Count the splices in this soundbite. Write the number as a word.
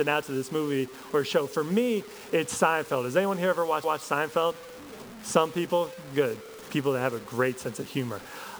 one